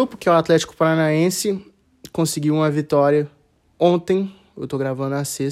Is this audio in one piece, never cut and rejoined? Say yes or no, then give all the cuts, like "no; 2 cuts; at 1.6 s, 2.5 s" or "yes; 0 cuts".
yes; 0 cuts